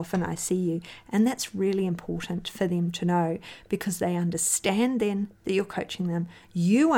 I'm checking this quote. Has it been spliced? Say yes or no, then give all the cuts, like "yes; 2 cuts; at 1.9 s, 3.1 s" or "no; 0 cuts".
no; 0 cuts